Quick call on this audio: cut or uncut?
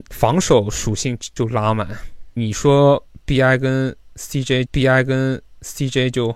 cut